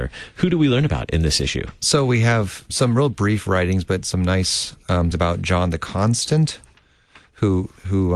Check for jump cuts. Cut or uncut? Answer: cut